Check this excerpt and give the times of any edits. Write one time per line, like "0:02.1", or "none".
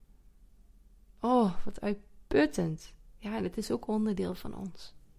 none